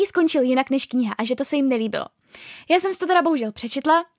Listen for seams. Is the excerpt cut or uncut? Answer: uncut